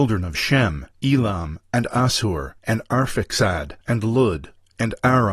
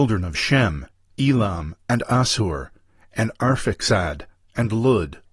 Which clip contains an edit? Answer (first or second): first